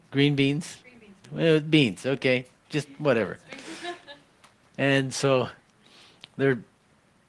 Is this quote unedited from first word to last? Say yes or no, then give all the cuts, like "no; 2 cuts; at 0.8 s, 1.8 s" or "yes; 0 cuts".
yes; 0 cuts